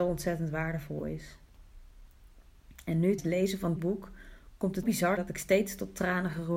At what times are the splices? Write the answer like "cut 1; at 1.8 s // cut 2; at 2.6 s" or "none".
cut 1; at 3.2 s // cut 2; at 3.8 s // cut 3; at 4.8 s // cut 4; at 5.2 s